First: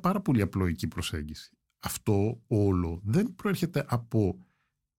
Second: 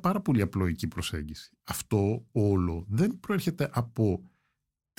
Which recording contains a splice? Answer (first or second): second